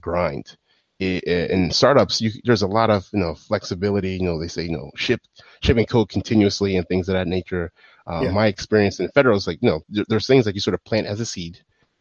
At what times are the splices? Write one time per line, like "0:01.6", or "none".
none